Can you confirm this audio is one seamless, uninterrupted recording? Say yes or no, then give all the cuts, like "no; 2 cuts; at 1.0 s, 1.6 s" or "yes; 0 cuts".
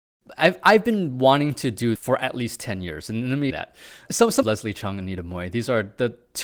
no; 3 cuts; at 2.0 s, 3.5 s, 4.4 s